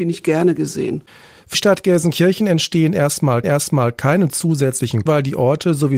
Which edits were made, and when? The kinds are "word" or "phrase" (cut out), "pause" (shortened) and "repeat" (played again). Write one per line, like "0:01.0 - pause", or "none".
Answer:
0:01.5 - word
0:03.4 - repeat
0:05.1 - word